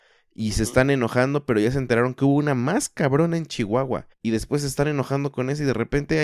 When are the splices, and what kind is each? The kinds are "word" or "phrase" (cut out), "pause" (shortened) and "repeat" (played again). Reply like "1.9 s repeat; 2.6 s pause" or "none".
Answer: 4.1 s pause